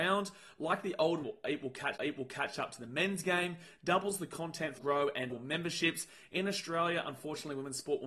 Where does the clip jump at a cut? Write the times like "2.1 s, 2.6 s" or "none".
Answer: 1.2 s, 2.0 s, 4.8 s, 5.3 s